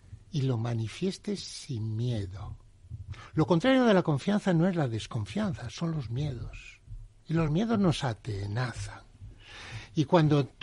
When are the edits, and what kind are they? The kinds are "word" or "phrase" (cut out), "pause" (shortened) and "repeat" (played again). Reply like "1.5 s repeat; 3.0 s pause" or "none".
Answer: none